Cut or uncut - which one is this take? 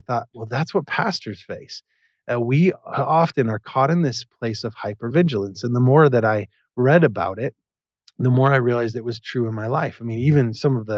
uncut